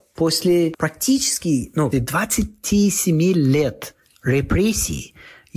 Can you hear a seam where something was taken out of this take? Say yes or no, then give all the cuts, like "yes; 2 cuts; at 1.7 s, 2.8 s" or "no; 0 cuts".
yes; 1 cut; at 1.9 s